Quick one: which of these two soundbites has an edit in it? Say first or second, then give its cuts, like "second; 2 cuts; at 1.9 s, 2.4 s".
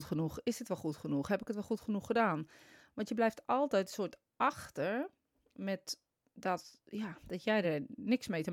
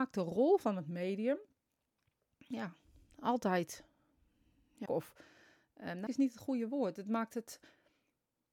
second; 2 cuts; at 4.9 s, 6.1 s